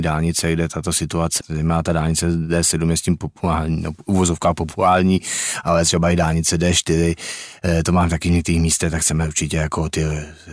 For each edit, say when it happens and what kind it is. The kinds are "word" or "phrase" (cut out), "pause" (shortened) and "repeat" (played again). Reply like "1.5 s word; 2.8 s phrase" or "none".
1.4 s word